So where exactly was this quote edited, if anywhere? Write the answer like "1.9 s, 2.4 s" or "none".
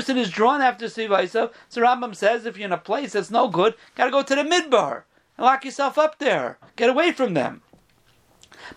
none

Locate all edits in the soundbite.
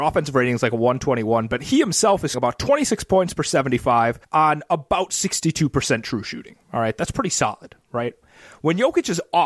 2.3 s, 4.2 s

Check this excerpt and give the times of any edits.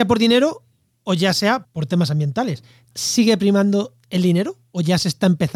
1.6 s, 2.9 s

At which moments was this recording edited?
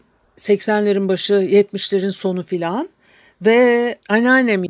none

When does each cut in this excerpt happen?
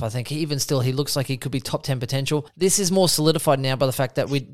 2.5 s

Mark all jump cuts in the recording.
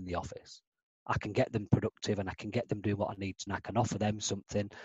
3.5 s

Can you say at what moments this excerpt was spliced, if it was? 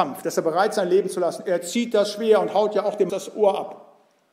3.1 s

